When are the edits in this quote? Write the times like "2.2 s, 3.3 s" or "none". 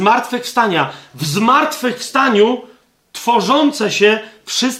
none